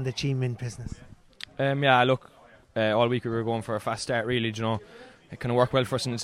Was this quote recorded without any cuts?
yes; 0 cuts

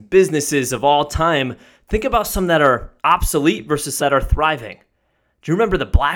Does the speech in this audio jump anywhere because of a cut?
yes; 2 cuts; at 3.0 s, 4.0 s

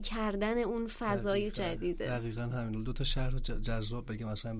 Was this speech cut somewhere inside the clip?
no; 0 cuts

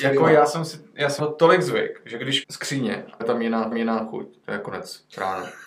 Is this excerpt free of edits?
no; 4 cuts; at 1.2 s, 2.4 s, 3.2 s, 3.7 s

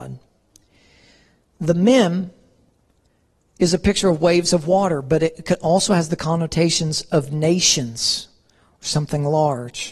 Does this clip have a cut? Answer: no; 0 cuts

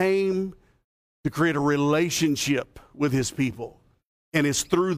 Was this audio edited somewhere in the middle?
no; 0 cuts

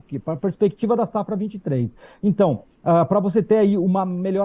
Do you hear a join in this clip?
no; 0 cuts

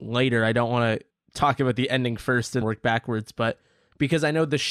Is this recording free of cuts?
no; 1 cut; at 2.6 s

